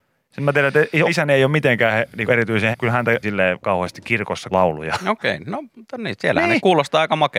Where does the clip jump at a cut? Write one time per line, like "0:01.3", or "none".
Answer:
0:01.0
0:02.3
0:02.7
0:03.2
0:03.6
0:04.5